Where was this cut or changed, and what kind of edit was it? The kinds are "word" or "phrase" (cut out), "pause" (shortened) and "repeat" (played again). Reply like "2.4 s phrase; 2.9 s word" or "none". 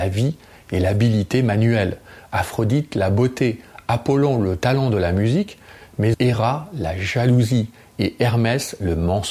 6.1 s word